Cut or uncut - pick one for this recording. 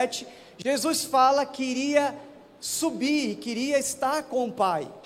uncut